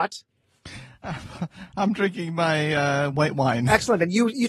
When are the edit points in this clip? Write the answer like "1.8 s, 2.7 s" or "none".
none